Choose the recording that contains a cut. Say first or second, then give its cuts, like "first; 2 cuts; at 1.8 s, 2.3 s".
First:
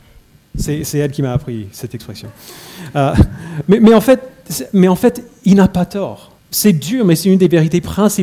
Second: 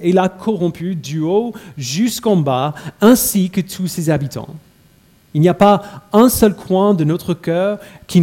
first; 1 cut; at 6.4 s